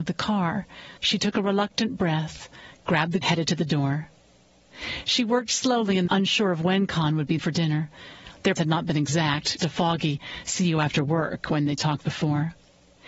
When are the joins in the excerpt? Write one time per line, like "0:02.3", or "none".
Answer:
0:01.0
0:03.2
0:06.1
0:07.4
0:08.6
0:09.6
0:12.0

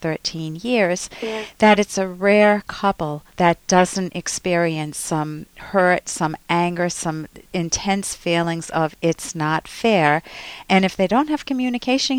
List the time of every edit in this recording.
0:03.3

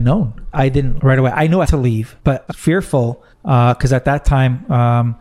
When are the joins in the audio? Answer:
0:01.0
0:01.6
0:02.2
0:02.5
0:03.3

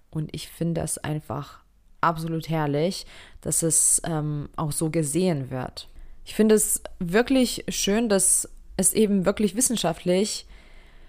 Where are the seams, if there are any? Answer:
none

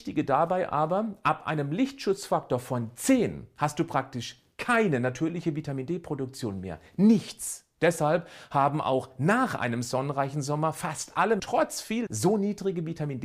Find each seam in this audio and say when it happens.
0:11.4
0:12.1

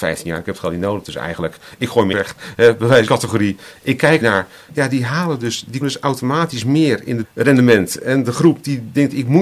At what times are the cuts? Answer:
0:02.1
0:03.1
0:04.2
0:05.8
0:07.2

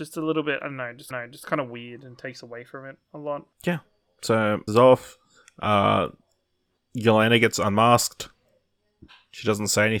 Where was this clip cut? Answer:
0:01.1
0:03.5
0:04.7

